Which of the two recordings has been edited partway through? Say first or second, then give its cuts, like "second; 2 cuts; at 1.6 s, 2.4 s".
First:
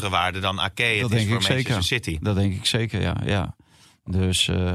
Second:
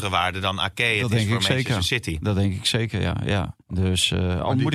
second; 1 cut; at 3.6 s